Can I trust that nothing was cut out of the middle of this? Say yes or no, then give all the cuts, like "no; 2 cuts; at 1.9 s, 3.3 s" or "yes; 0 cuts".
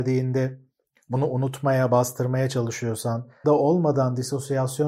no; 1 cut; at 3.4 s